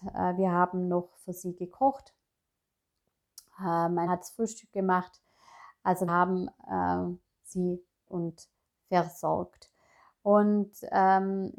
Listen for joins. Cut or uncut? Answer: cut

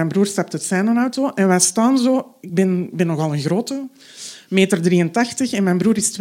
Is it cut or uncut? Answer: uncut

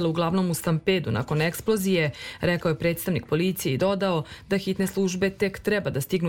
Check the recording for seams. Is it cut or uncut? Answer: uncut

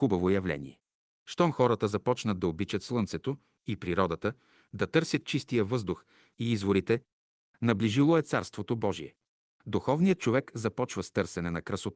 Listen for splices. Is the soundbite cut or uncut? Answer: uncut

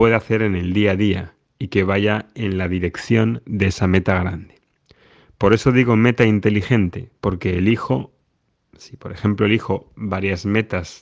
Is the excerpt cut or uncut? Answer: uncut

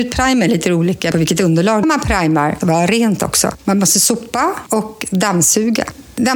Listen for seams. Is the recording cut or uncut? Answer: cut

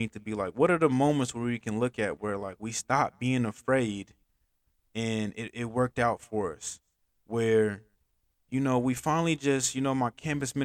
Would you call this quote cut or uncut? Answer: uncut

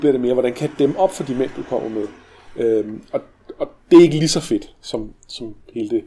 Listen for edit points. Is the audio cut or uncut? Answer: cut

